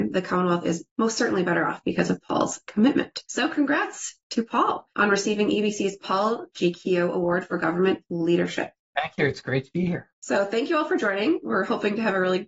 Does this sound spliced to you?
yes; 1 cut; at 10.1 s

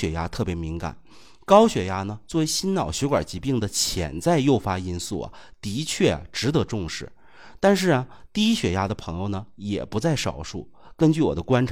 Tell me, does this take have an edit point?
no; 0 cuts

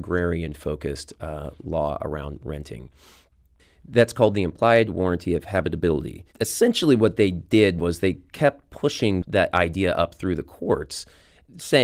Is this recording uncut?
no; 1 cut; at 6.3 s

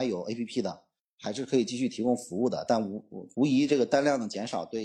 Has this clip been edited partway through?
yes; 1 cut; at 3.3 s

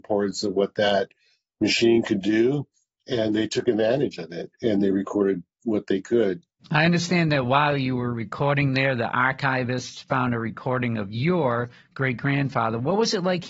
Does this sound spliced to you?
no; 0 cuts

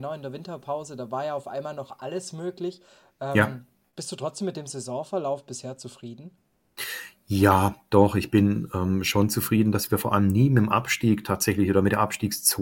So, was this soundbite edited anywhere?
no; 0 cuts

